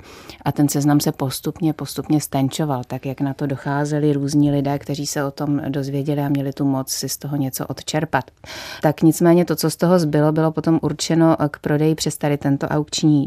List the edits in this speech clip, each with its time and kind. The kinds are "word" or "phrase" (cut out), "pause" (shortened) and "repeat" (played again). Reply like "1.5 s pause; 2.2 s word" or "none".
none